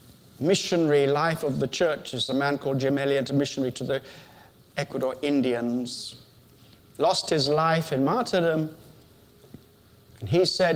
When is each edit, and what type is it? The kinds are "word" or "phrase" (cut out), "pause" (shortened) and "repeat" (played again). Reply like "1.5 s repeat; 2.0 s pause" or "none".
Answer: none